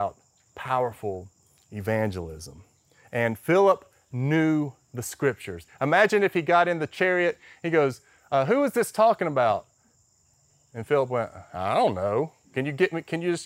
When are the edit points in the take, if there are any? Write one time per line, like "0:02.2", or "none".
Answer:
none